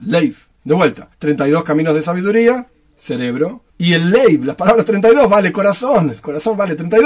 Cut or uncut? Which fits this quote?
cut